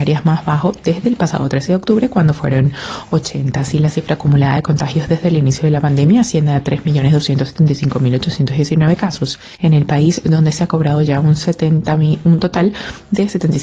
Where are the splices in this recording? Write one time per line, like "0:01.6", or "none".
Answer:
none